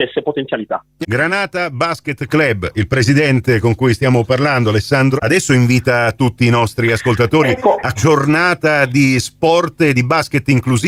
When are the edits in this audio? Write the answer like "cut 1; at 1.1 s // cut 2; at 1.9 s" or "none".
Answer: cut 1; at 1.0 s // cut 2; at 5.2 s // cut 3; at 7.9 s